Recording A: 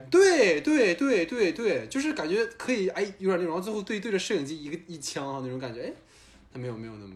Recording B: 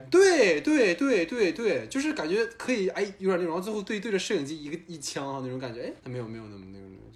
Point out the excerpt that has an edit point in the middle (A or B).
B